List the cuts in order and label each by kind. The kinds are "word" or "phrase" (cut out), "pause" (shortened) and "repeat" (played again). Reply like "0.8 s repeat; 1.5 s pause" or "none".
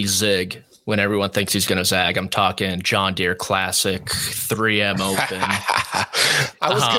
none